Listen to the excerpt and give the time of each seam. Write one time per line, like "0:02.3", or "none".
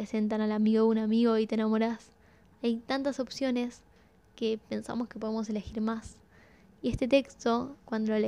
none